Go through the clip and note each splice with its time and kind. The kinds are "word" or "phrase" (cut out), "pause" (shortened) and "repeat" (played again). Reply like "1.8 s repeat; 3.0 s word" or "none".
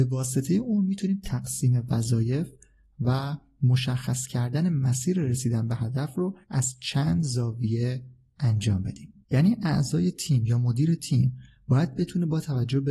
6.4 s pause; 9.2 s pause